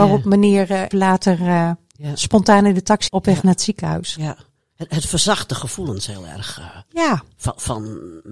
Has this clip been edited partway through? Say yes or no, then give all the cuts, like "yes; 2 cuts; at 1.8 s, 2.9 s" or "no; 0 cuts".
yes; 2 cuts; at 0.9 s, 3.1 s